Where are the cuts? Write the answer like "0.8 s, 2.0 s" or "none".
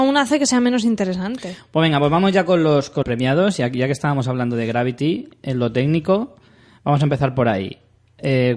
3.0 s